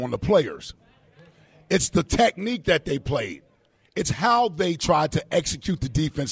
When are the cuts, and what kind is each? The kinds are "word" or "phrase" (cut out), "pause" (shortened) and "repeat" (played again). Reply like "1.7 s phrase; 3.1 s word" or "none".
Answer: none